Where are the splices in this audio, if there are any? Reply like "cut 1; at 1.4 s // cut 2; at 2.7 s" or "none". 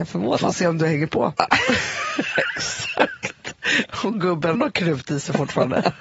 cut 1; at 4.5 s